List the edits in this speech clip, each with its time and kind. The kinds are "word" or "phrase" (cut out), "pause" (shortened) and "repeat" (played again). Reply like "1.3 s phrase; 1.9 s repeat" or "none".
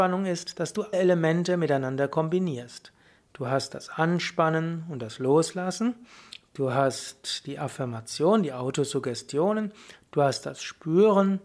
0.9 s word